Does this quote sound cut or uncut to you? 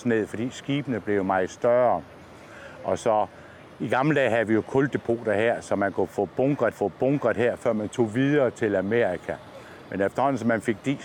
cut